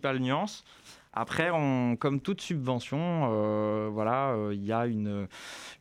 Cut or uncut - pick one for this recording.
uncut